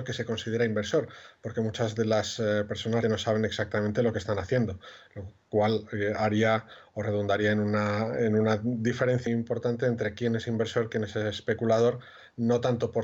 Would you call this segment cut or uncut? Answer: cut